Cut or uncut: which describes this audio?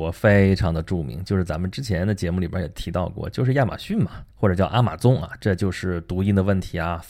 cut